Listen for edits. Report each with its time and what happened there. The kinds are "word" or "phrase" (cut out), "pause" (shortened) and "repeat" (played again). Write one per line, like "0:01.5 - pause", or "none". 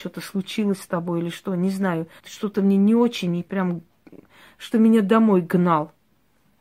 0:02.2 - pause
0:04.7 - word

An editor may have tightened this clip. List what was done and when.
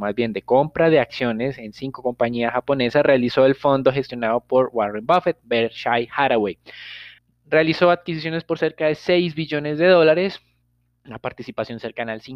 0:07.2 - pause

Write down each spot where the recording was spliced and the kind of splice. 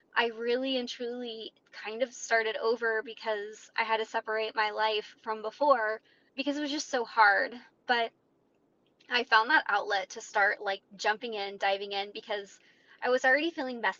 0:06.3 - word

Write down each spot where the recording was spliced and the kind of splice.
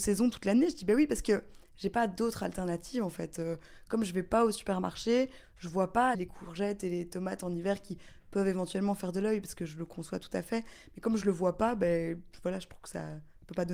0:06.1 - word

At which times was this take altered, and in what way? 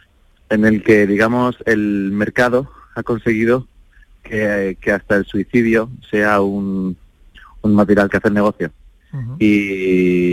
0:08.1 - phrase

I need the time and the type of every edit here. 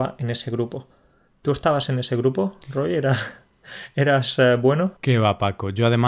0:05.0 - pause

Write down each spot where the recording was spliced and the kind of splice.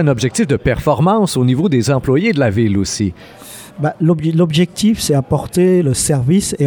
0:03.7 - pause

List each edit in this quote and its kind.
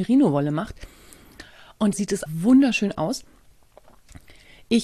0:01.9 - word
0:02.3 - word

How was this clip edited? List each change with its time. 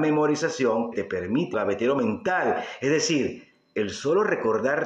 0:00.9 - word
0:01.5 - phrase

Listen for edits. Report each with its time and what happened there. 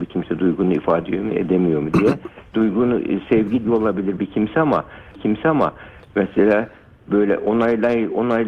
0:02.5 - word
0:03.6 - phrase
0:05.2 - repeat

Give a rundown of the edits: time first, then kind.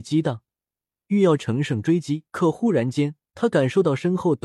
0:02.3 - pause
0:03.3 - pause

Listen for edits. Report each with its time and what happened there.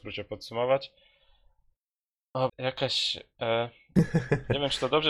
0:02.5 - word

